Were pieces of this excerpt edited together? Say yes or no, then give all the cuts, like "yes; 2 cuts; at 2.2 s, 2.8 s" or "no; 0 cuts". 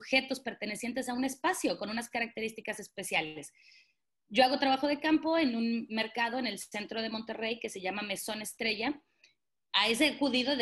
no; 0 cuts